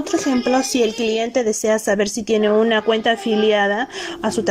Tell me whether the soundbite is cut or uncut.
uncut